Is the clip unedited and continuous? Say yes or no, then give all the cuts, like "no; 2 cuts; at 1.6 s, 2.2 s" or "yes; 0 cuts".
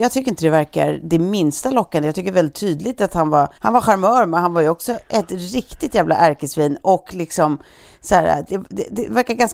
no; 1 cut; at 3.6 s